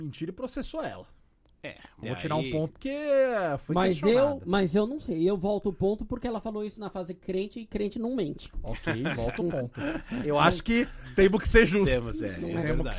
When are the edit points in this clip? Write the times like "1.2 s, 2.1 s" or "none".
2.0 s, 2.7 s